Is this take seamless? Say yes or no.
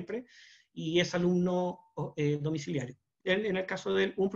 no